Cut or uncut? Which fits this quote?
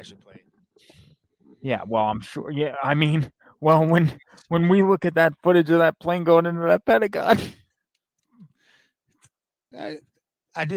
cut